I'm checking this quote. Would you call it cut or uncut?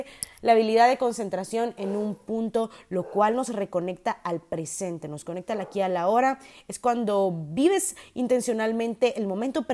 uncut